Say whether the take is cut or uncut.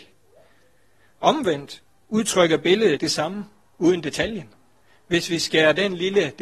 cut